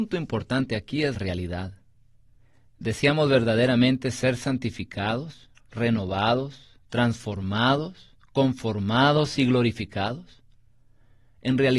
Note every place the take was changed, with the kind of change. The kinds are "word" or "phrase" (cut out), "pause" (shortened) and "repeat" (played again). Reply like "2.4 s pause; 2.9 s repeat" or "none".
1.1 s word